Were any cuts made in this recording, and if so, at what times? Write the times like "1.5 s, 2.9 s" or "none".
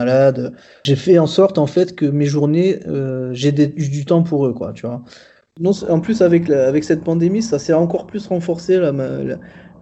none